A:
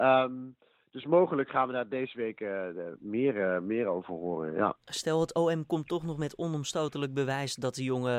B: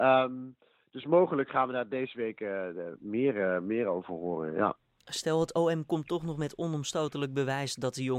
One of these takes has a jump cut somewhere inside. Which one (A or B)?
A